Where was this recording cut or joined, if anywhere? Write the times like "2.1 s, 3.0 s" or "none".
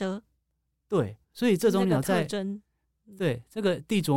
1.2 s

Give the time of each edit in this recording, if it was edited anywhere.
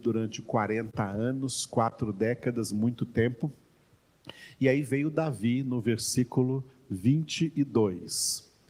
none

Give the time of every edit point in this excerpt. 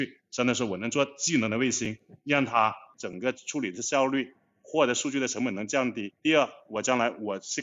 2.2 s, 6.2 s

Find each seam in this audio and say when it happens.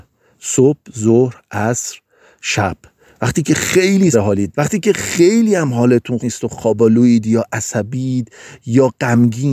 4.1 s, 4.5 s, 6.2 s

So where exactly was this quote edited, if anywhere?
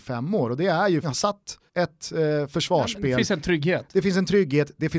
1.0 s, 1.7 s

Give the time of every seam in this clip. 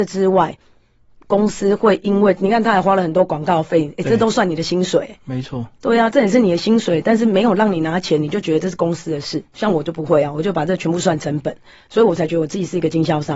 9.5 s

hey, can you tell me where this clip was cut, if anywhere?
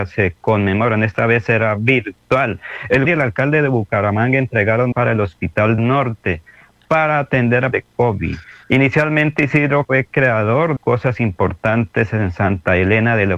3.0 s, 4.9 s, 5.8 s, 7.7 s, 9.8 s, 10.8 s

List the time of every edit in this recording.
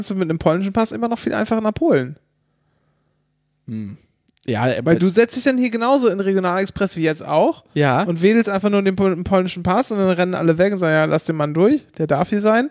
none

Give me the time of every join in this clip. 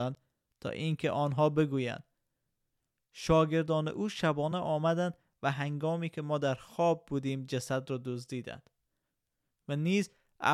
none

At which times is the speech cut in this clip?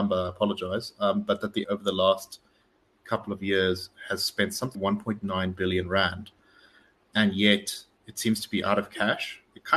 1.6 s, 4.7 s

